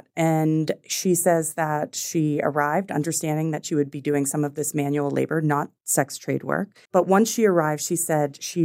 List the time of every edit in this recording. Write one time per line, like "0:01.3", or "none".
0:06.9